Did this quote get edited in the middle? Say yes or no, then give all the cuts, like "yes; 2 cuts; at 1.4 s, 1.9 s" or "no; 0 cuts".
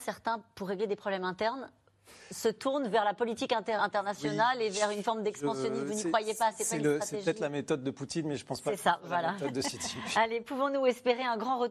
yes; 1 cut; at 3.8 s